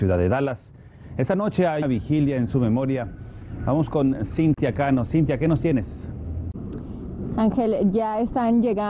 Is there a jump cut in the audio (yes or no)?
yes